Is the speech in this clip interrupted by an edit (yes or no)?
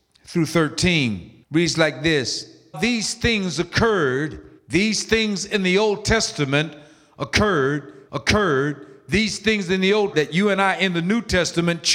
yes